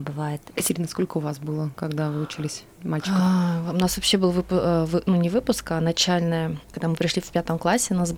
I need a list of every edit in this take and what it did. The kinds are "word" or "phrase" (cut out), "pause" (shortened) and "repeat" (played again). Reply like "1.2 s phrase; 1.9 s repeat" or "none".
6.6 s pause